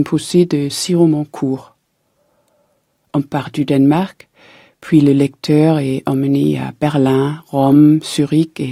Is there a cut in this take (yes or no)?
no